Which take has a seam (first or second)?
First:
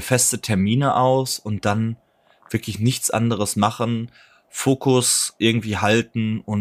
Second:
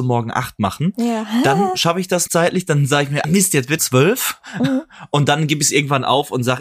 second